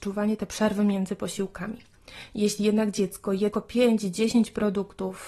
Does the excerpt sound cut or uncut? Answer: cut